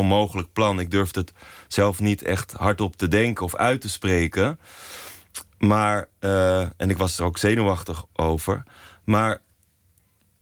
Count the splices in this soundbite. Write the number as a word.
zero